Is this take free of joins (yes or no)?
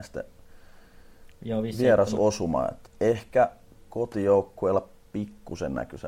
no